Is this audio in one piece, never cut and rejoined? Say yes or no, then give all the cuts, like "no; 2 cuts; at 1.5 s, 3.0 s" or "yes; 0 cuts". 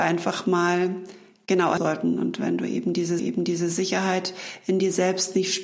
no; 2 cuts; at 1.8 s, 3.2 s